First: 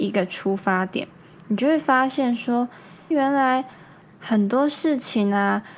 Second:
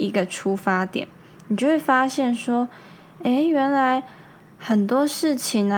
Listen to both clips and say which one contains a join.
first; 1 cut; at 3.1 s

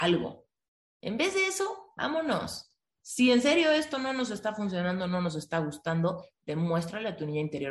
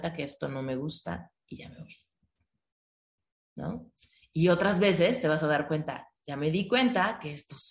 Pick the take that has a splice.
second; 1 cut; at 6.2 s

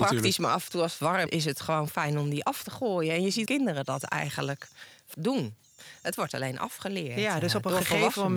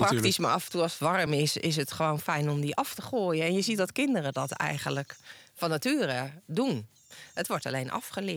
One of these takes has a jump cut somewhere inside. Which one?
first; 3 cuts; at 1.3 s, 3.5 s, 5.1 s

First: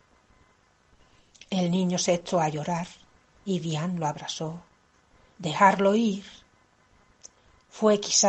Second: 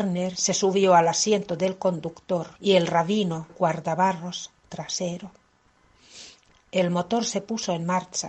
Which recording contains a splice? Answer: second; 2 cuts; at 2.6 s, 3.5 s

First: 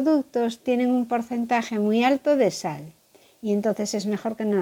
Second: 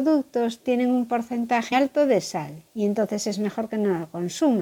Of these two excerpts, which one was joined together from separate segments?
second; 2 cuts; at 1.7 s, 2.7 s

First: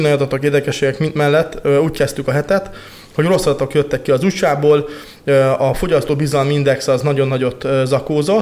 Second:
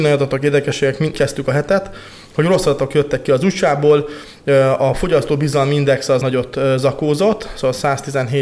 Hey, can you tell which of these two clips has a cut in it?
second; 2 cuts; at 1.1 s, 6.2 s

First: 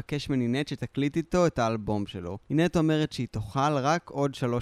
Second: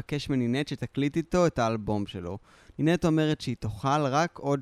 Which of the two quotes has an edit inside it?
first; 1 cut; at 2.4 s

